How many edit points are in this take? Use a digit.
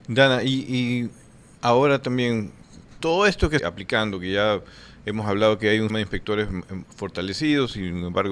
3